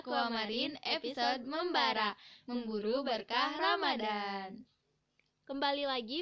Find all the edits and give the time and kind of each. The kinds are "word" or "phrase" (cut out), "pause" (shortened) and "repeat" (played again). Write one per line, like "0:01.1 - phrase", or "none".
none